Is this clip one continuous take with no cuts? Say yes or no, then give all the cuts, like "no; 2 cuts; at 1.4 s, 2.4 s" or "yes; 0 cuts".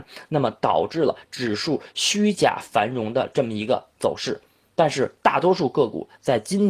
yes; 0 cuts